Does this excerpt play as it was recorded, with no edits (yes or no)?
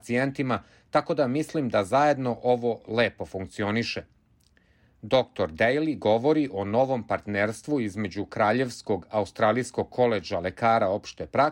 yes